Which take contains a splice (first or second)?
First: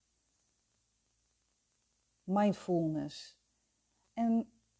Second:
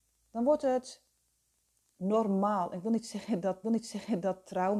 second